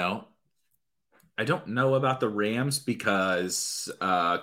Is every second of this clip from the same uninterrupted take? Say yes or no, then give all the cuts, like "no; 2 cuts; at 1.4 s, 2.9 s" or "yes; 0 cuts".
yes; 0 cuts